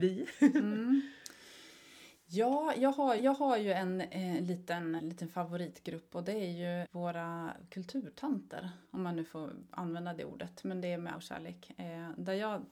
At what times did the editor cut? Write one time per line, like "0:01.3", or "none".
0:03.2
0:05.0
0:06.8
0:08.8
0:11.1